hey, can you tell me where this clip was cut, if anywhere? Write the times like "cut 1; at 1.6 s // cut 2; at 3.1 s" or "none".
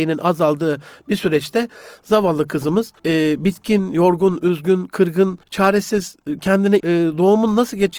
cut 1; at 3.0 s // cut 2; at 5.4 s // cut 3; at 6.8 s